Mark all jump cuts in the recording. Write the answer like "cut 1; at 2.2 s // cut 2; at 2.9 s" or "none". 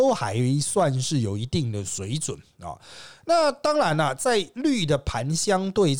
none